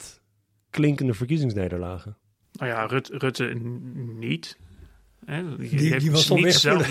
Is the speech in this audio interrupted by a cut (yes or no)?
no